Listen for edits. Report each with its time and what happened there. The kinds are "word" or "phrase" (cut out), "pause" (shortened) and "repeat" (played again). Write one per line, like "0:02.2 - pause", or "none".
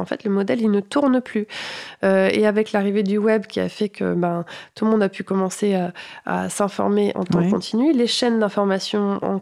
0:07.1 - phrase

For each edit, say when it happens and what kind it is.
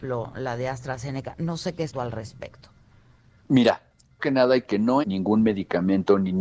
0:01.9 - word
0:04.2 - word
0:04.6 - word
0:05.0 - word

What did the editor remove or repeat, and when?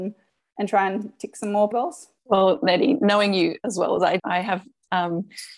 0:01.7 - word
0:04.2 - word

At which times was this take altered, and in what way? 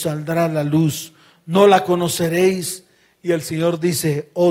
none

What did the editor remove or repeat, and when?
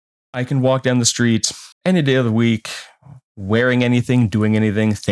0:01.7 - pause

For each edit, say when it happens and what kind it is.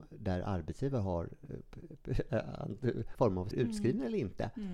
0:03.1 - word
0:03.5 - word

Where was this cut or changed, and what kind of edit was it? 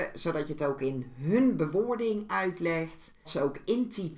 0:03.2 - word

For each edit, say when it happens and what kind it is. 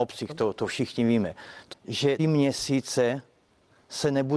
0:01.7 - word
0:02.2 - word

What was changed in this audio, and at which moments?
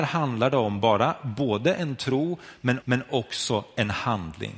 0:02.8 - repeat

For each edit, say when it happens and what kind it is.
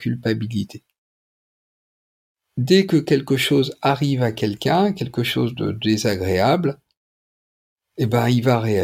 none

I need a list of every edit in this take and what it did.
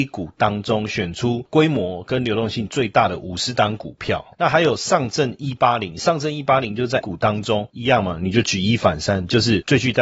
0:07.0 - word

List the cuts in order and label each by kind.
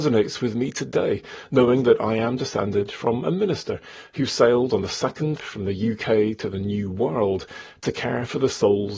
0:05.4 - phrase

